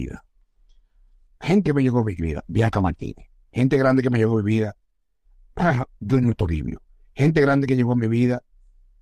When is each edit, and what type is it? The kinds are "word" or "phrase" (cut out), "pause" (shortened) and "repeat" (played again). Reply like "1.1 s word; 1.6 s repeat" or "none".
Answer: 1.6 s word